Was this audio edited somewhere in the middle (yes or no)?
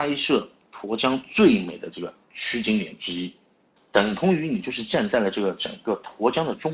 no